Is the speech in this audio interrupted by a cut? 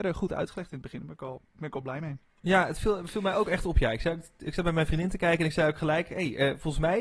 yes; 1 cut; at 1.5 s

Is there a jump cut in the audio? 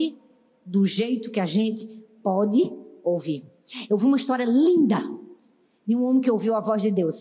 no; 0 cuts

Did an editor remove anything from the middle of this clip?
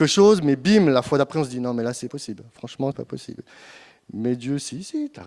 yes; 2 cuts; at 2.1 s, 2.9 s

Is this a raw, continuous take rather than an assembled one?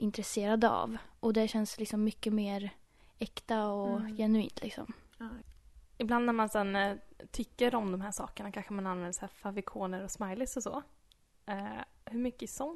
yes; 0 cuts

